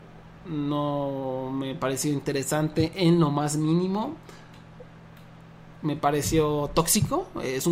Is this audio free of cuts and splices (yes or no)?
yes